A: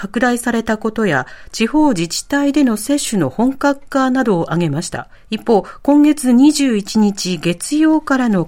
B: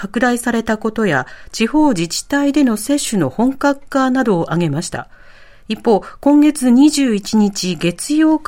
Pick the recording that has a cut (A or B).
A